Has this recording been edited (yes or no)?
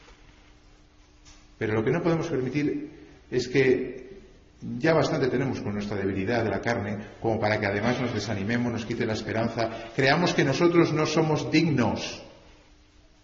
no